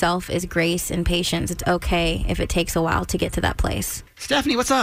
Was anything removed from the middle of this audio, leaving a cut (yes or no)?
yes